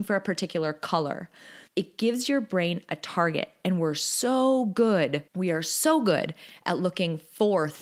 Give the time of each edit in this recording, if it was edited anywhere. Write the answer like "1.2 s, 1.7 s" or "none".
1.7 s, 5.3 s